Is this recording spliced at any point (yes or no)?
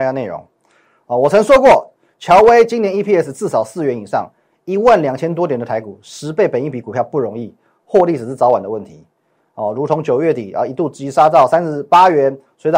no